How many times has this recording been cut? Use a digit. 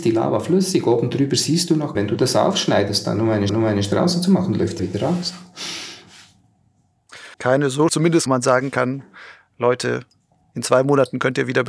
6